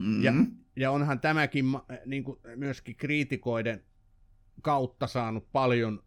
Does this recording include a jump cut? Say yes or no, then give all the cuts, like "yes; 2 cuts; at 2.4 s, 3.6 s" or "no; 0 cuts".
no; 0 cuts